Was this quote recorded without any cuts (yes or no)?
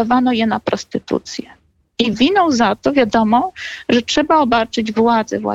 yes